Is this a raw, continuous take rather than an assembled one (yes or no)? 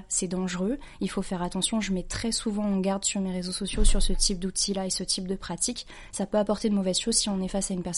yes